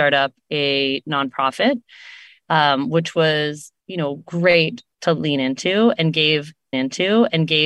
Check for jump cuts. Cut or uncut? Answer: cut